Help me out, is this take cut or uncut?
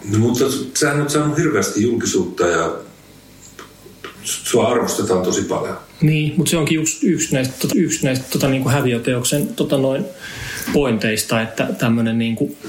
cut